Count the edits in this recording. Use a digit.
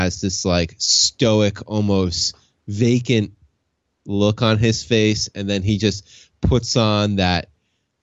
0